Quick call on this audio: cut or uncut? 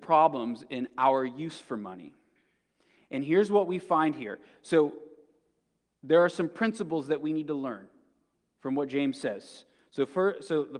uncut